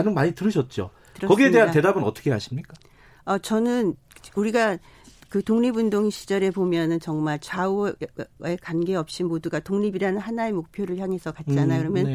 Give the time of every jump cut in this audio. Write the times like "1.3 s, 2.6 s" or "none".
none